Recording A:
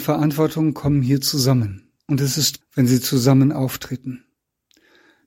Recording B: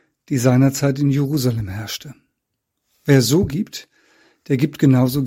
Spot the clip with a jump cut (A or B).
A